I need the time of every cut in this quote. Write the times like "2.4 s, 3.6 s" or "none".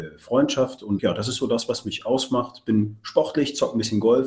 1.0 s